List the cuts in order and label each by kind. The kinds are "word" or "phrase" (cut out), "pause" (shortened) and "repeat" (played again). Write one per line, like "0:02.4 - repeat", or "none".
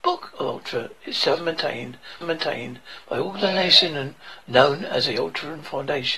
0:01.4 - phrase
0:02.2 - repeat

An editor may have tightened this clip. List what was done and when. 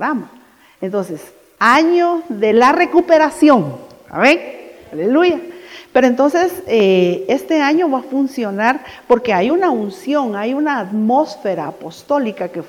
none

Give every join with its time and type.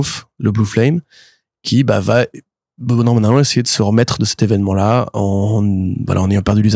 none

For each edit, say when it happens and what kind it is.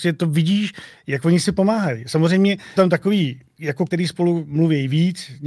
0:02.8 - word
0:03.9 - word

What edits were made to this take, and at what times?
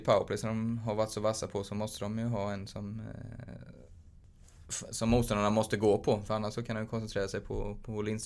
none

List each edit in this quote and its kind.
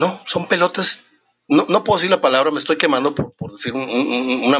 none

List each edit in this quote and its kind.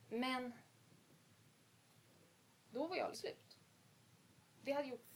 0:03.1 - word

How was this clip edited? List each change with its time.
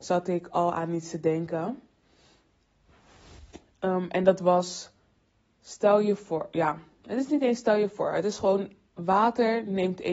none

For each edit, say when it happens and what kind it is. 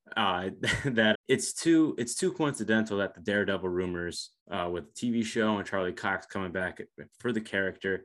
0:01.1 - word
0:04.4 - pause

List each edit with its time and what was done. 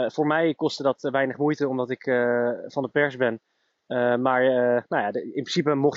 none

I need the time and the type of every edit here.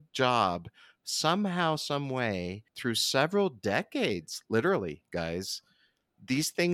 0:02.7 - pause

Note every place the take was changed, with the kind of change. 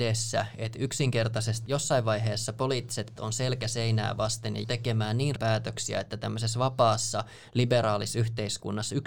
0:01.7 - word
0:03.2 - word
0:04.6 - word
0:05.4 - word

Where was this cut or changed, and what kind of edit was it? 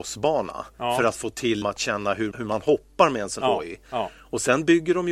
0:01.6 - word
0:02.3 - word
0:03.4 - word

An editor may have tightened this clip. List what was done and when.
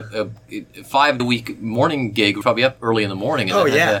0:01.2 - word
0:02.4 - word

